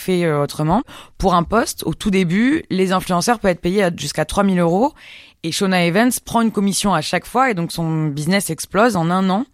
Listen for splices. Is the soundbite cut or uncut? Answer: uncut